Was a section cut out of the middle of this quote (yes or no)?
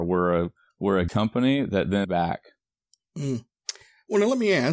yes